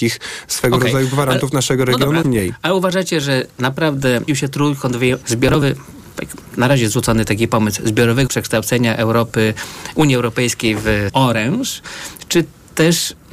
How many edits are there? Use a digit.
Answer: 5